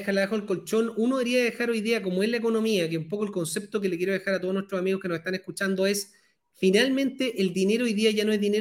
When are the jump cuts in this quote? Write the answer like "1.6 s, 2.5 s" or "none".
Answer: none

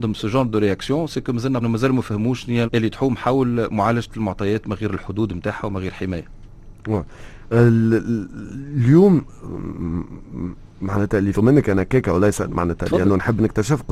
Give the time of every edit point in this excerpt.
1.6 s, 2.6 s, 11.3 s

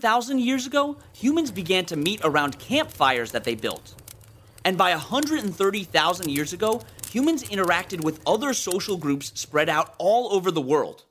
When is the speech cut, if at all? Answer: none

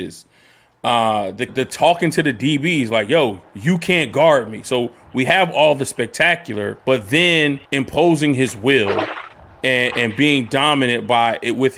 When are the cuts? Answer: 1.5 s, 3.5 s, 6.8 s, 7.6 s

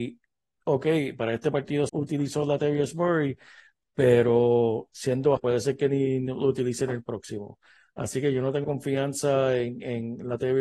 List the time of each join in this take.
1.9 s, 5.4 s, 8.6 s

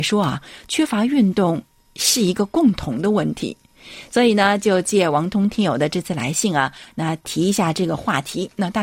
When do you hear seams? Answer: none

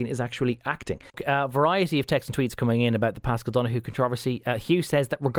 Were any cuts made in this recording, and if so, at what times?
1.1 s

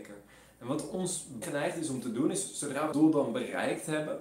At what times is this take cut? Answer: 1.4 s, 2.9 s

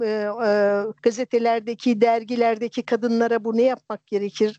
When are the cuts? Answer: 1.0 s

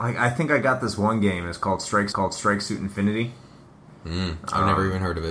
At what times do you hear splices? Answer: 2.1 s

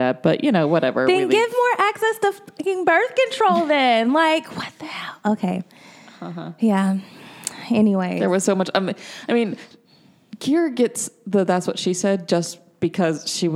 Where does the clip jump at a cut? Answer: none

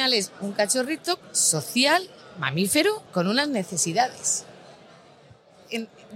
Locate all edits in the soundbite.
1.2 s, 3.1 s

